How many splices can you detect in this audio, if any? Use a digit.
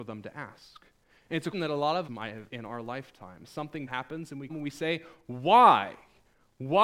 5